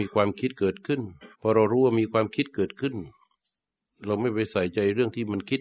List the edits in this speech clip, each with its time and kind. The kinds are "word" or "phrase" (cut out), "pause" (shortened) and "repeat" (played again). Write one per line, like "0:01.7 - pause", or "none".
0:01.3 - pause